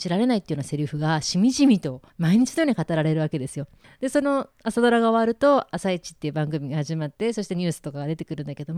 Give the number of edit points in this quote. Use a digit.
2